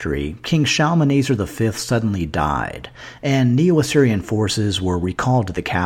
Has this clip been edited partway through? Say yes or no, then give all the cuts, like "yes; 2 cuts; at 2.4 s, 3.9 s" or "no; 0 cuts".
no; 0 cuts